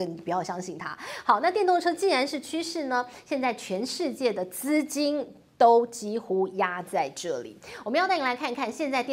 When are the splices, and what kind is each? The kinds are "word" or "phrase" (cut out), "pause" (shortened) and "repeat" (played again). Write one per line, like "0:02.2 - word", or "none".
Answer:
none

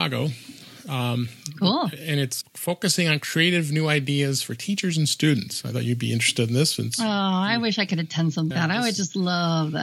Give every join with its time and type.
0:02.4 - word
0:08.5 - word

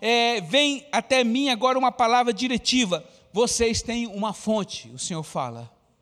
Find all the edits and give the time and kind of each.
none

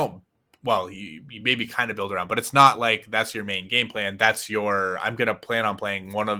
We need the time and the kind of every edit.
none

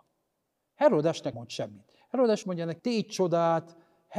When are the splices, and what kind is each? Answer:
0:01.3 - word
0:02.4 - word
0:02.8 - word

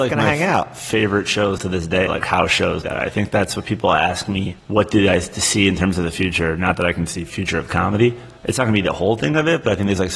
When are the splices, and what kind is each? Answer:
0:01.6 - word
0:02.1 - word
0:02.8 - word
0:04.6 - pause
0:08.4 - pause

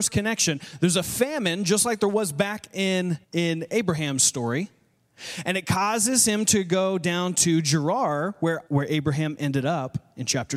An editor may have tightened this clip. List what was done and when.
0:03.2 - pause
0:08.7 - pause

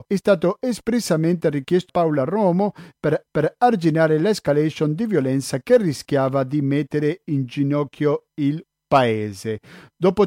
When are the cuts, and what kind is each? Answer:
0:01.9 - phrase
0:03.3 - repeat

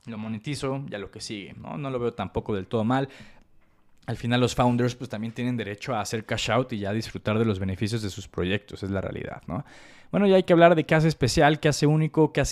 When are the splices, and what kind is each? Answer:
none

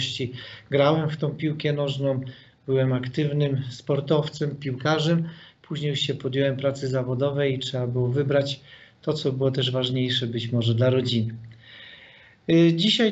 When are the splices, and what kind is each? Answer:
none

